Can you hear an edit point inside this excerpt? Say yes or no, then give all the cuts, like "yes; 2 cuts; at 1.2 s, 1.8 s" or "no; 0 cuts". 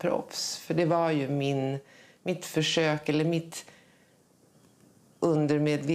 no; 0 cuts